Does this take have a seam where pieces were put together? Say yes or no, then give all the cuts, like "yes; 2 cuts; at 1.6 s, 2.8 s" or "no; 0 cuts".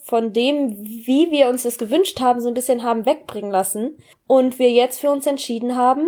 yes; 1 cut; at 4.1 s